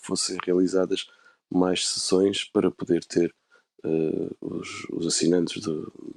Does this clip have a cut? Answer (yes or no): no